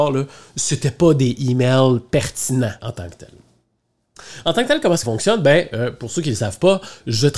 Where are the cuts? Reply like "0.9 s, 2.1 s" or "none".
2.8 s, 5.0 s